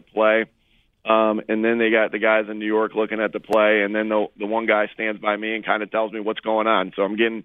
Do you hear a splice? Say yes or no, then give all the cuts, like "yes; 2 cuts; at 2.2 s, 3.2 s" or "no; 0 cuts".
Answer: no; 0 cuts